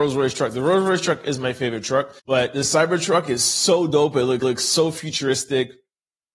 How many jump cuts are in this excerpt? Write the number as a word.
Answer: two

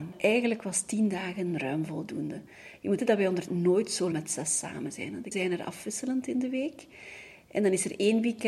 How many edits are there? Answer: four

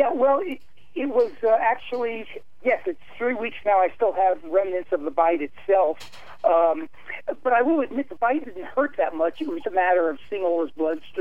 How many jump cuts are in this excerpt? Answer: three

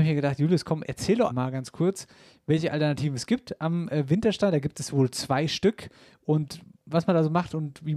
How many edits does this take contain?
one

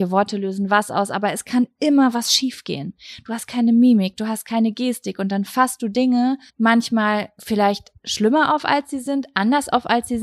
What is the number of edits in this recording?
two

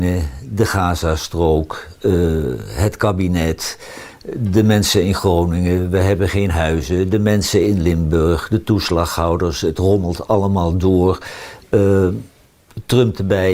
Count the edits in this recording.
zero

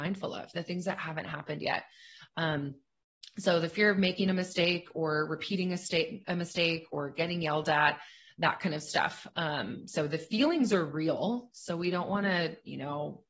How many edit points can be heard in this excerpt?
zero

